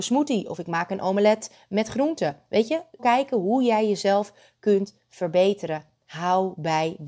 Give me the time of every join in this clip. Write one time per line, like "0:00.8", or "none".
0:03.0